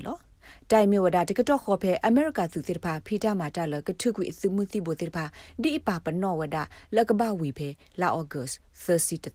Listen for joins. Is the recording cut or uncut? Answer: uncut